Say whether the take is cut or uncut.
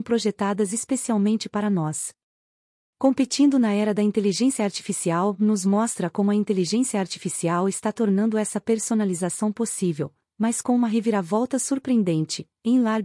uncut